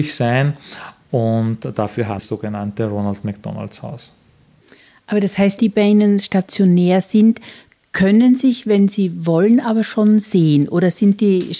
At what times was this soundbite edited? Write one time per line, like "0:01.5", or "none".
0:02.2
0:05.6